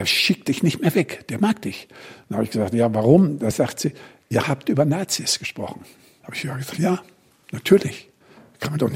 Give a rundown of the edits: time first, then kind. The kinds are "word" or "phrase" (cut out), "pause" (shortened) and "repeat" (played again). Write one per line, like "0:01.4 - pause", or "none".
none